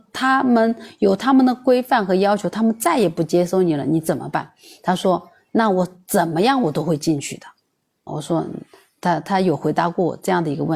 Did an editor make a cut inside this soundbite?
yes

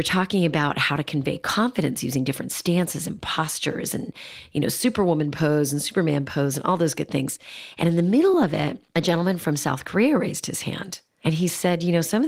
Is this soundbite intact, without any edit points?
yes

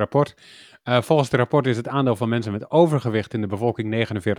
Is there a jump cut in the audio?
no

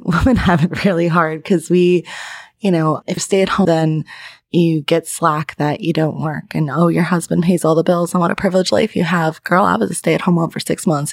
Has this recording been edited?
yes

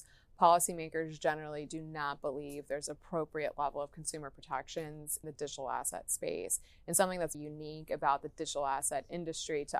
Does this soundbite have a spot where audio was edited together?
yes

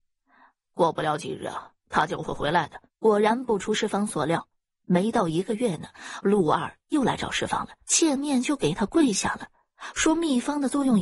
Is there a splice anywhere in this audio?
yes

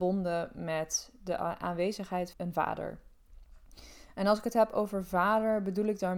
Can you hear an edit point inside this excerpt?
yes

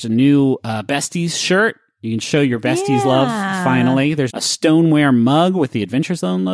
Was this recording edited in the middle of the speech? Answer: yes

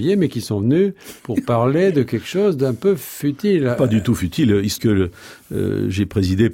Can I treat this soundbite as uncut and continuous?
no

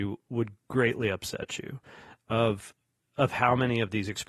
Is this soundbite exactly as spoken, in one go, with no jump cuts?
yes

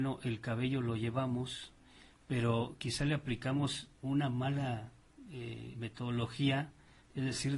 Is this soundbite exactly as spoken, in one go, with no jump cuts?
yes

